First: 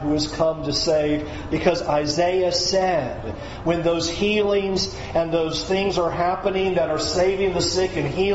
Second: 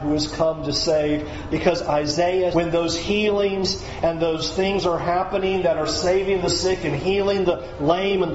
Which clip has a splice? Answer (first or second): second